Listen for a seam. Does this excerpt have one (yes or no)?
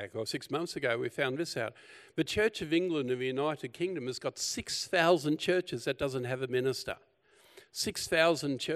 no